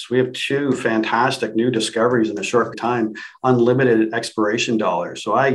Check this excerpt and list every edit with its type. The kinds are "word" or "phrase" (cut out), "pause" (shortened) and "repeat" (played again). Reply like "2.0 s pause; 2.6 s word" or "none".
2.7 s word